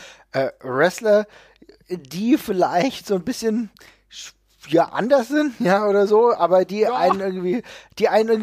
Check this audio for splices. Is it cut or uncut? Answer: uncut